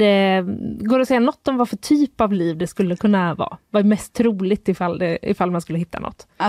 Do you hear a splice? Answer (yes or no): no